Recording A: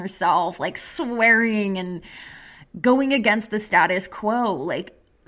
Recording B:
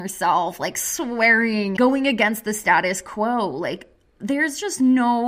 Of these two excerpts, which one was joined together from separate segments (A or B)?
B